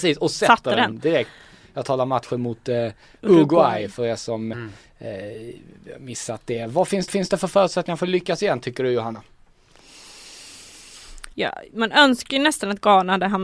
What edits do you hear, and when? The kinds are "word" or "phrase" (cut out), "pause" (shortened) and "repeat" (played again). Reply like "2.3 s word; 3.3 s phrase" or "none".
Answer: 4.5 s word; 7.1 s repeat